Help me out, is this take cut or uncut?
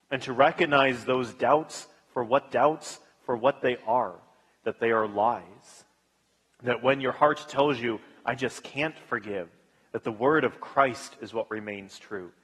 cut